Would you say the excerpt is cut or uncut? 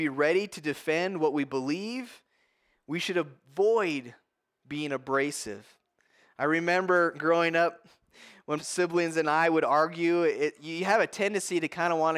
cut